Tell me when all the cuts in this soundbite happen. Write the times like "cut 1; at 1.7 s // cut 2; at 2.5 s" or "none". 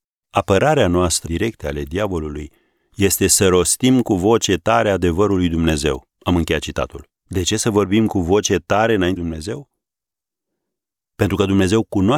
cut 1; at 1.2 s // cut 2; at 6.1 s // cut 3; at 7.1 s // cut 4; at 9.2 s